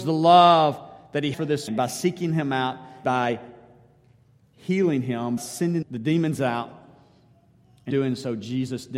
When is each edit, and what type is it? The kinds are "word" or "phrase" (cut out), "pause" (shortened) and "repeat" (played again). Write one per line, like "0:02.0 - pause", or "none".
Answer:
0:01.3 - word
0:01.7 - word
0:03.0 - word
0:05.4 - word
0:05.8 - word
0:07.9 - word

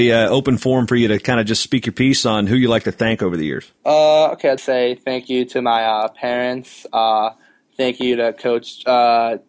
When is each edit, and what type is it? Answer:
0:03.8 - pause
0:04.6 - word

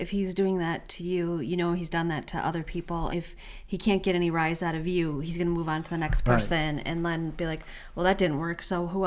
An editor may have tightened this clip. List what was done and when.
0:03.1 - word

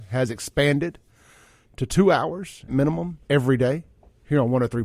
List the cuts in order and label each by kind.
0:02.7 - word
0:03.2 - pause

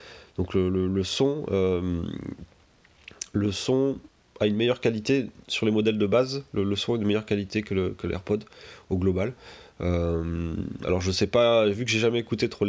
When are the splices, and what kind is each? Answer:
none

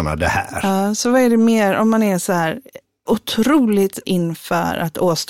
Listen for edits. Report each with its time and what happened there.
0:03.1 - word
0:04.0 - word

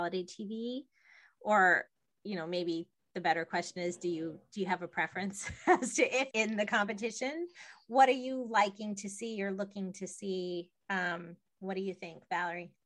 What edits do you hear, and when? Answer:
0:06.3 - phrase

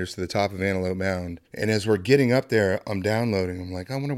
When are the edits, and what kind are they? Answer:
0:01.5 - pause

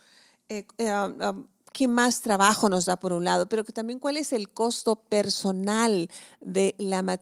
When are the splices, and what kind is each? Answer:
none

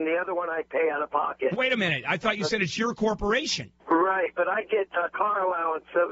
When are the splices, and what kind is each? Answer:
0:03.8 - pause

